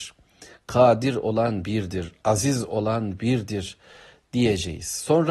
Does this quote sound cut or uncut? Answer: uncut